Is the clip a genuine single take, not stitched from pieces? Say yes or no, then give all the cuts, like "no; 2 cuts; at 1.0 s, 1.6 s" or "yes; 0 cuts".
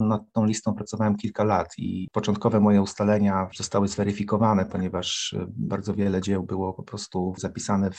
yes; 0 cuts